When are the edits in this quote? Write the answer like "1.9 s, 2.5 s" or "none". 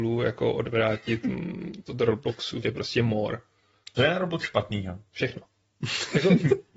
1.9 s, 2.6 s, 4.0 s, 4.4 s